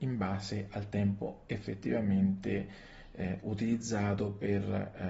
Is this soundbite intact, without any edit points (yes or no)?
yes